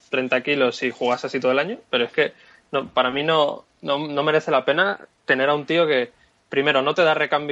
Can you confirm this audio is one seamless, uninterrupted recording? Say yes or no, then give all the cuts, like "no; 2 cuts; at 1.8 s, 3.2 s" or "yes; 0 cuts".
yes; 0 cuts